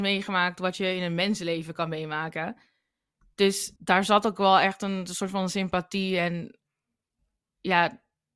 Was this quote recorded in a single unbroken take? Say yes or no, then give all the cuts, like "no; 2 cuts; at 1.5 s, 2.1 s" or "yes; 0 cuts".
no; 1 cut; at 3.8 s